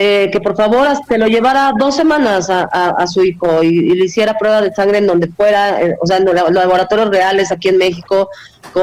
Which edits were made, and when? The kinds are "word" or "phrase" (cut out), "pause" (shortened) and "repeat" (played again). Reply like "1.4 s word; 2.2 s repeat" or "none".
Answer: none